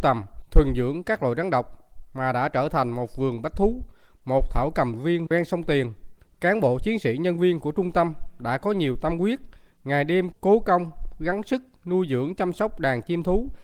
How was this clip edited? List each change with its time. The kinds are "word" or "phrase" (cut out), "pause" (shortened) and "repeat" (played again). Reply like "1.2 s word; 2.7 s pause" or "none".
5.3 s word